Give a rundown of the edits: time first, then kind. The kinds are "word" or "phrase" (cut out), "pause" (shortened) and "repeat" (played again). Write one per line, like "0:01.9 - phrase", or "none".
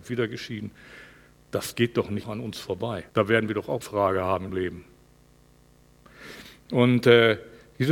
0:02.2 - word
0:03.1 - pause
0:03.8 - word
0:04.5 - word